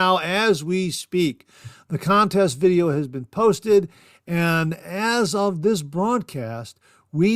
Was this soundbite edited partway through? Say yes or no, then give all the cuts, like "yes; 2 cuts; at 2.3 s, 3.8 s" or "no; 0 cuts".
no; 0 cuts